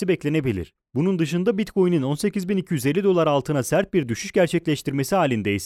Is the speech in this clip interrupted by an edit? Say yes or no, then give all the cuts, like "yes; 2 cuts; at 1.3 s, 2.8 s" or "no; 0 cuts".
no; 0 cuts